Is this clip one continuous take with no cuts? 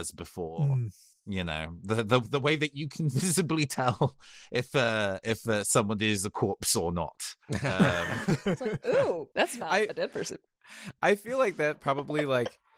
no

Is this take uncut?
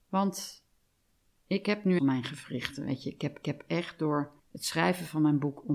no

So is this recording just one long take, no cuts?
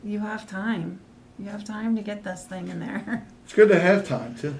yes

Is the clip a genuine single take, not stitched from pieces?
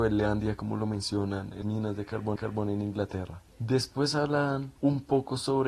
no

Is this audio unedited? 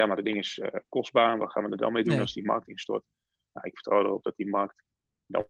yes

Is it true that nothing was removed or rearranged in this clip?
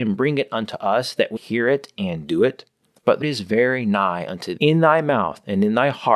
no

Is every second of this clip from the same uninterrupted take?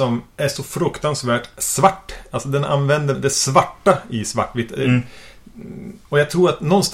no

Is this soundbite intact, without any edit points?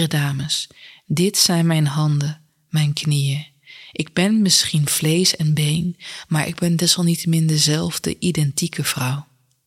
yes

